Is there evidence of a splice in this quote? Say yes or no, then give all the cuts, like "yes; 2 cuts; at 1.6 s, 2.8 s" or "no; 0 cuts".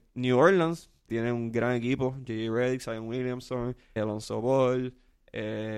yes; 2 cuts; at 1.1 s, 4.0 s